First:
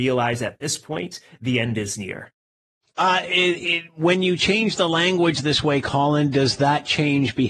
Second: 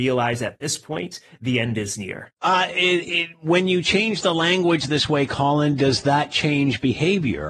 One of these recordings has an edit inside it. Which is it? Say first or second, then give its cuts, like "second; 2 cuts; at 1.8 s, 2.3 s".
second; 1 cut; at 2.4 s